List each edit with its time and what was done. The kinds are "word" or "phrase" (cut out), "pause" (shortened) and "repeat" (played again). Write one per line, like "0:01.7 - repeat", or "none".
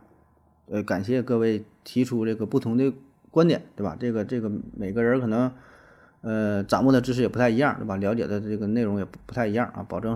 none